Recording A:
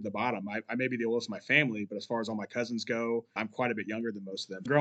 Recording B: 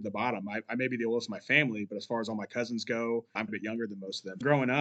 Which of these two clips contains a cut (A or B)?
B